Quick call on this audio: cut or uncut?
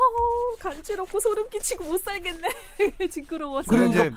uncut